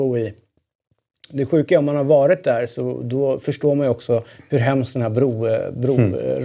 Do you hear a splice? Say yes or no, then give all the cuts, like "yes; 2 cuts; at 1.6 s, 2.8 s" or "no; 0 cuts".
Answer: no; 0 cuts